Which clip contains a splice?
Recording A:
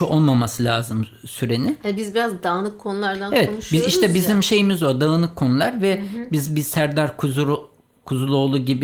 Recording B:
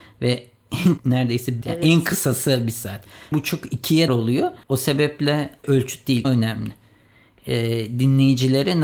B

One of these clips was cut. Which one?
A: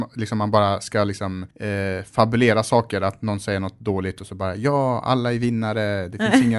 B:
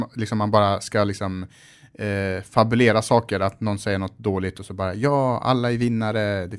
A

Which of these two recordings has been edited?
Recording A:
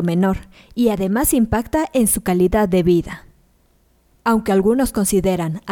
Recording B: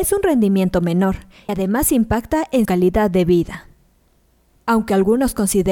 B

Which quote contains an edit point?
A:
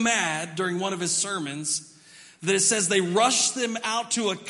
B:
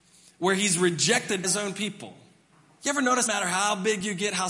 B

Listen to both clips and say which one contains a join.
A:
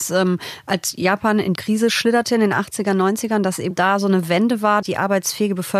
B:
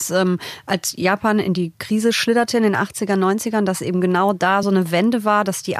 A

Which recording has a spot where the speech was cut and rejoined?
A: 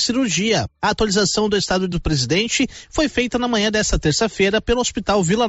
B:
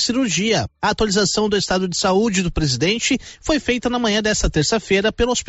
A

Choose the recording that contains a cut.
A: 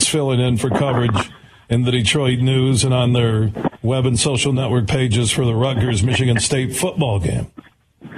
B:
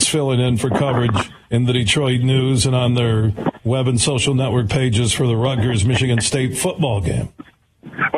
B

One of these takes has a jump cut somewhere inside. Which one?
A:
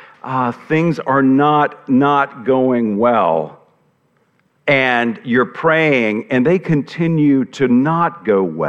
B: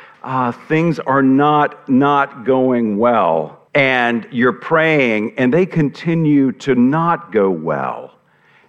B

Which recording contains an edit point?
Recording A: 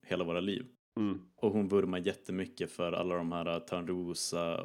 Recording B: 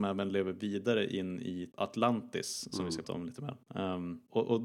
B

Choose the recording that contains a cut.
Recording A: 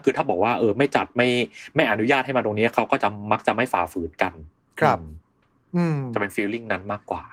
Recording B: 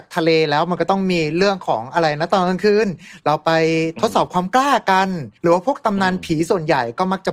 B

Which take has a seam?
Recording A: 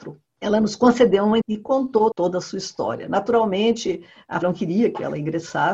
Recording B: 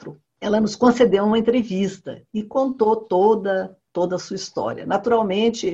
A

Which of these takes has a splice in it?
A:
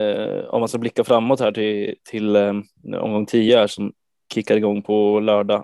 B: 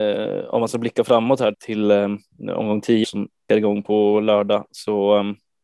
B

